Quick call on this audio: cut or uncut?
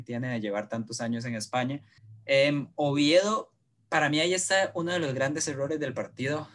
uncut